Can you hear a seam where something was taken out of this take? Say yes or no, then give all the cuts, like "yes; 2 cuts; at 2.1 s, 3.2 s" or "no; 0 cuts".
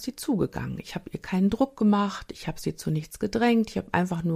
no; 0 cuts